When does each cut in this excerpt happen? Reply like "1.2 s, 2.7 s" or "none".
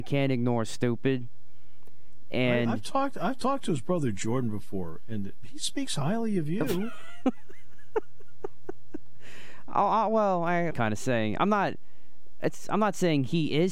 10.7 s